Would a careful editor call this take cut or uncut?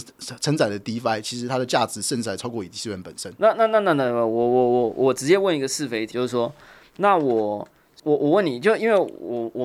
cut